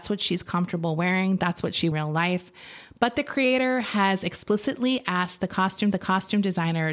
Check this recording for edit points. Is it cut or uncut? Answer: cut